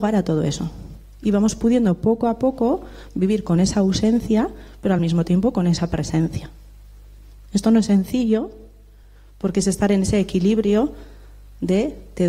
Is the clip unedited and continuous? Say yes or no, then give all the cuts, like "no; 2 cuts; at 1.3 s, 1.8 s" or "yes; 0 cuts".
yes; 0 cuts